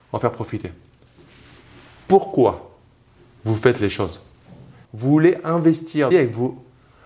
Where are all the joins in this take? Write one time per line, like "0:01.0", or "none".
0:04.9
0:06.1

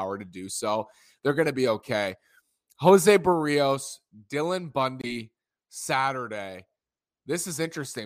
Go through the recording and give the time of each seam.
none

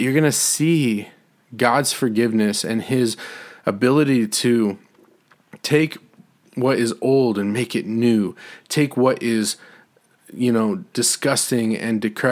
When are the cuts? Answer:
none

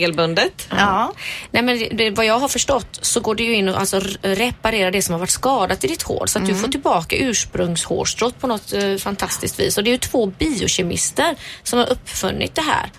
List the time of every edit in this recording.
none

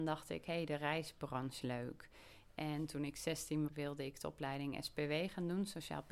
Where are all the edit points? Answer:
0:01.6
0:03.7

